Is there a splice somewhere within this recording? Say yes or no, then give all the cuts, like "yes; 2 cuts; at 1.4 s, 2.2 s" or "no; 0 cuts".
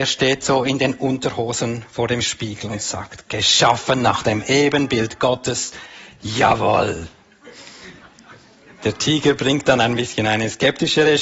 no; 0 cuts